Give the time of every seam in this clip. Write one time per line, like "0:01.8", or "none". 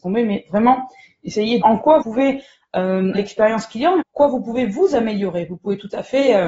0:01.6
0:02.0
0:03.1
0:04.0